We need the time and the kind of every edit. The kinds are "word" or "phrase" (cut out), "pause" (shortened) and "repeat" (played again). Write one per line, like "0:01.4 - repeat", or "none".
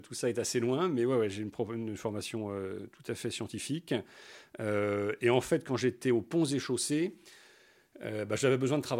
none